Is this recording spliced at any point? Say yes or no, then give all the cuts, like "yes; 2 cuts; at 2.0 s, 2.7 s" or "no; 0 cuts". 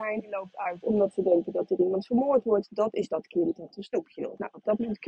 no; 0 cuts